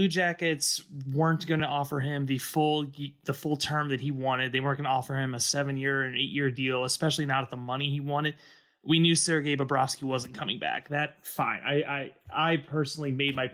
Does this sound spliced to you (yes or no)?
no